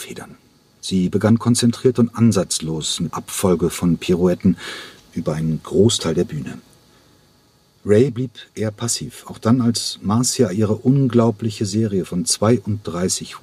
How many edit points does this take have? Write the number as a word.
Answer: one